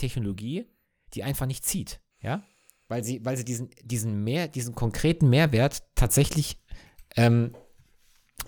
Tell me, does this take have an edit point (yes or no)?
yes